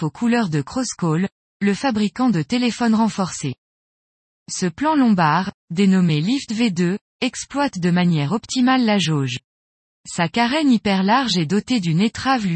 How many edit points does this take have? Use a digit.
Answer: 0